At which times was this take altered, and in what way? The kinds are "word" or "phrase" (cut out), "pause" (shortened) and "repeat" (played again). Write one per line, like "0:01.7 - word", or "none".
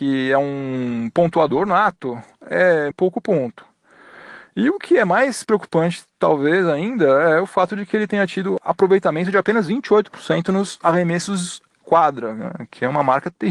0:02.9 - phrase
0:11.8 - word